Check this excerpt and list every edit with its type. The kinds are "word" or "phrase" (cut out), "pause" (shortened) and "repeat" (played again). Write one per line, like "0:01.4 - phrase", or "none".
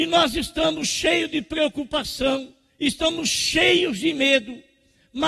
0:02.7 - pause